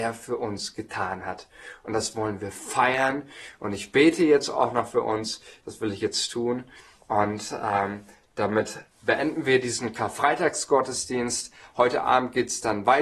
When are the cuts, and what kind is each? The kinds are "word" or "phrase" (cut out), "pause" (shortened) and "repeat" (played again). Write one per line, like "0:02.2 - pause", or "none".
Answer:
none